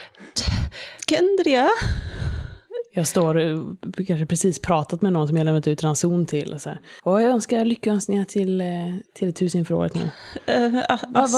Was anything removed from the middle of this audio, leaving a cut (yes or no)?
yes